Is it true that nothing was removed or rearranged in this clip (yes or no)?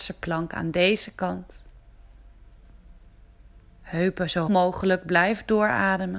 no